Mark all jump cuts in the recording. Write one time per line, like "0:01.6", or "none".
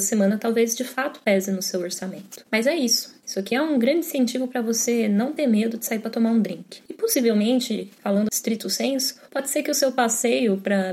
0:08.3